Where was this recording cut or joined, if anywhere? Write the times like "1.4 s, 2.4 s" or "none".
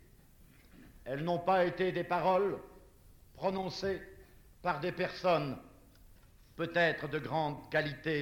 none